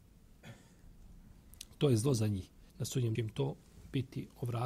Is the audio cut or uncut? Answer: cut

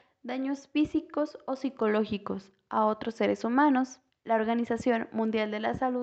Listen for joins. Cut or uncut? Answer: cut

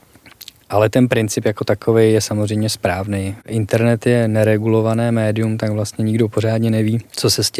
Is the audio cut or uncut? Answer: uncut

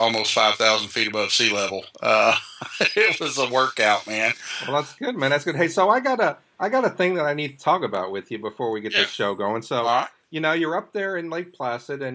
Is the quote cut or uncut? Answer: uncut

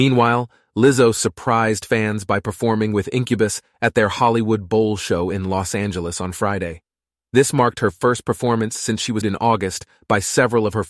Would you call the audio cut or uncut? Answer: cut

